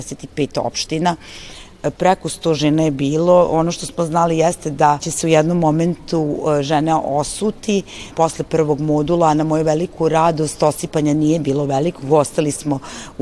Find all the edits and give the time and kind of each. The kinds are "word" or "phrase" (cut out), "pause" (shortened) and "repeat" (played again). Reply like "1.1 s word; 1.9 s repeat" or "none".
5.0 s word; 8.1 s word